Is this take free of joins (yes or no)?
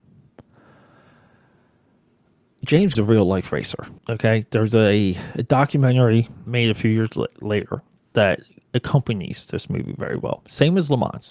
no